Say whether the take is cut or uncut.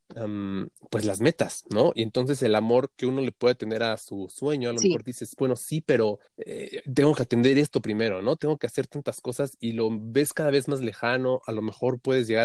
cut